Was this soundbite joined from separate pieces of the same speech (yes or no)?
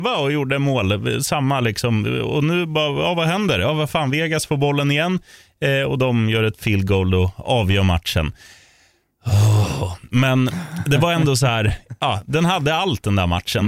no